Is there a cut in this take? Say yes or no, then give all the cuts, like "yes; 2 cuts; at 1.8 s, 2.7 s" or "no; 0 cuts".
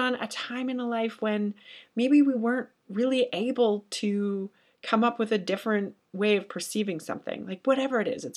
no; 0 cuts